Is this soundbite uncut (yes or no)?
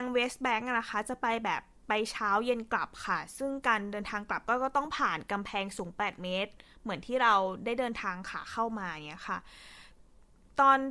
yes